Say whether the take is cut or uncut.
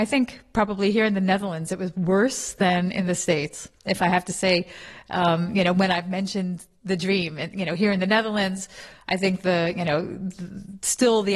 uncut